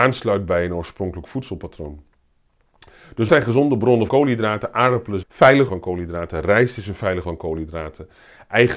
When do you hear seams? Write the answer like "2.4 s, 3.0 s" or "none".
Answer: 3.3 s, 4.1 s, 5.2 s, 5.7 s, 7.2 s